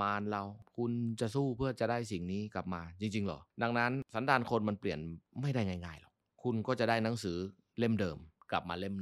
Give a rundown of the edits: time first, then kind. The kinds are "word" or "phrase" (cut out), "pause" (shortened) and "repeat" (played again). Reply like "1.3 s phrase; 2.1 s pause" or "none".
none